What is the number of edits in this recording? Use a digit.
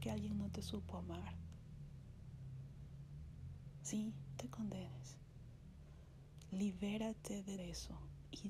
2